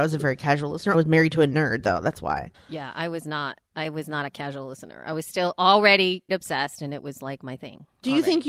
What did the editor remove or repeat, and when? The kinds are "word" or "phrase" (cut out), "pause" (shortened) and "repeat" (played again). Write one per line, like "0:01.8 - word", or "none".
0:00.9 - phrase
0:02.5 - pause
0:06.3 - word